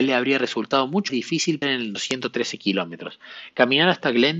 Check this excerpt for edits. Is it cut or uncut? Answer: cut